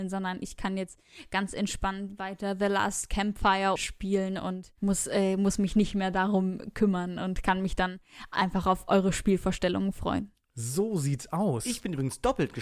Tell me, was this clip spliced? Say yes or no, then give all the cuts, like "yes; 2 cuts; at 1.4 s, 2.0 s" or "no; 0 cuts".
yes; 1 cut; at 4.8 s